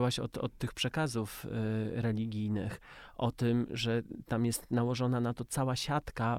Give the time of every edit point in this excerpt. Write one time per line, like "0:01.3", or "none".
none